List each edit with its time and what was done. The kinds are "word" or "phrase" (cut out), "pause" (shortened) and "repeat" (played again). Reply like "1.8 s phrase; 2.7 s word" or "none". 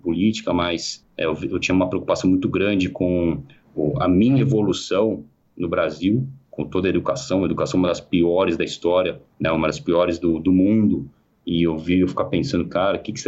none